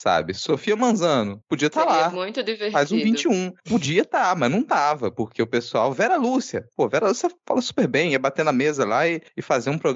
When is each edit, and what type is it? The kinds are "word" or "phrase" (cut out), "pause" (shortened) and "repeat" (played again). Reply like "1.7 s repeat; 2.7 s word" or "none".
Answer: none